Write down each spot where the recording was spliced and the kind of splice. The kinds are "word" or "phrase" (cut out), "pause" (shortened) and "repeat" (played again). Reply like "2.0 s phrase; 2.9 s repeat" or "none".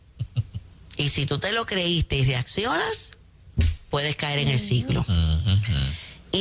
none